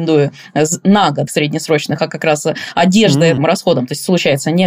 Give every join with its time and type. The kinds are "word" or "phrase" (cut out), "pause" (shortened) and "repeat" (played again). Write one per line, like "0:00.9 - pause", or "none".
0:01.3 - phrase
0:02.0 - word
0:03.4 - phrase